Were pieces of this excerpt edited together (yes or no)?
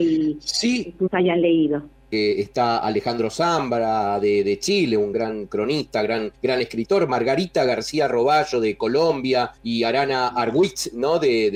yes